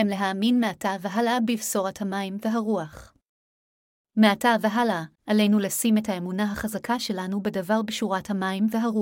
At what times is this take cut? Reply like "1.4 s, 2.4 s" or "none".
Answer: 5.1 s